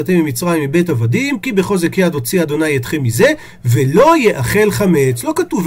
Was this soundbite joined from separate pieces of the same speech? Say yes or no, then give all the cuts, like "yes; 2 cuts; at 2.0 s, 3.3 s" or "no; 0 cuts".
no; 0 cuts